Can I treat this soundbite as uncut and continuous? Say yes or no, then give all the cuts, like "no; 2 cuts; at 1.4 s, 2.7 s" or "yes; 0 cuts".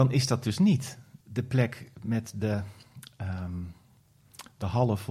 no; 1 cut; at 1.2 s